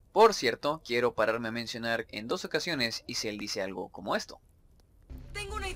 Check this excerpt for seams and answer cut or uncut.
cut